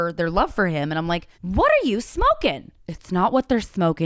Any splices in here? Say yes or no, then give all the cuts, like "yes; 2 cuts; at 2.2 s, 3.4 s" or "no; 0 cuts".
yes; 2 cuts; at 1.3 s, 2.8 s